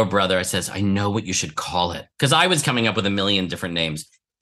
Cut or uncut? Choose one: cut